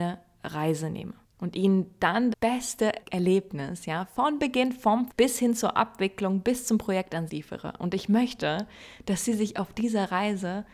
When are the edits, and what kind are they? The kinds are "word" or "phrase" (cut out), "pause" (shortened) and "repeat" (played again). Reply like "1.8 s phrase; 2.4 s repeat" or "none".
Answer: 1.2 s pause; 2.3 s word; 3.0 s word; 5.1 s word; 7.3 s phrase